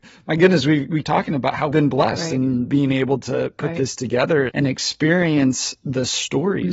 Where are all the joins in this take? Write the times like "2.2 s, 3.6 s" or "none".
1.0 s, 1.7 s, 4.5 s